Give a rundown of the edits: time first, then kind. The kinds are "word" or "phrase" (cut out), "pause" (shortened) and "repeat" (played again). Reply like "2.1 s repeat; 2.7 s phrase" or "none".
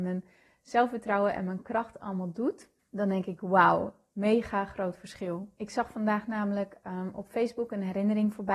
2.8 s pause; 4.1 s phrase; 5.5 s pause